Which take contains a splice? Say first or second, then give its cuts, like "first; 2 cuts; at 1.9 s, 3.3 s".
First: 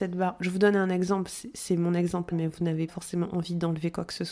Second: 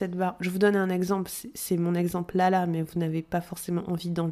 first; 2 cuts; at 2.3 s, 2.9 s